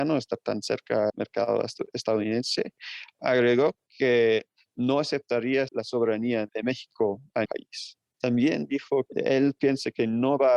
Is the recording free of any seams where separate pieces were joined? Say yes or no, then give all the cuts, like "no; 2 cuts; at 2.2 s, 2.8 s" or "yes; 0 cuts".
no; 6 cuts; at 1.1 s, 3.2 s, 5.7 s, 6.5 s, 7.4 s, 9.1 s